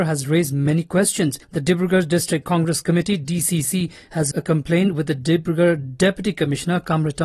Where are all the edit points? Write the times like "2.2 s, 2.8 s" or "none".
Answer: 1.4 s, 4.3 s